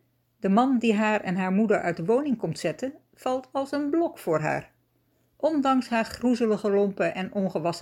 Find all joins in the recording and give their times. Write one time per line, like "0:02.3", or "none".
none